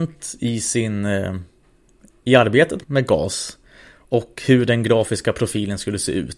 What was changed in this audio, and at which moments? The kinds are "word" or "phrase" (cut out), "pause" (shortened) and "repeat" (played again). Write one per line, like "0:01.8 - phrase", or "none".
0:02.8 - word